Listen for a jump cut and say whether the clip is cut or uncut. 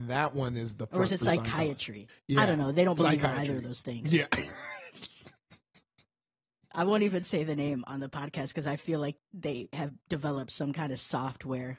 uncut